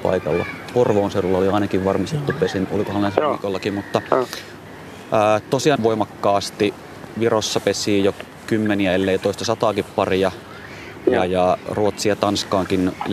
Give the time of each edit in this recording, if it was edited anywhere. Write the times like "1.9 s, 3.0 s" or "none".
2.7 s, 5.8 s